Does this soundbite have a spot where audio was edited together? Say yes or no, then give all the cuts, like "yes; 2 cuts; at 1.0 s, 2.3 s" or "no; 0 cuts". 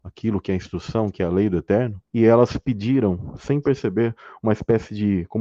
yes; 1 cut; at 2.1 s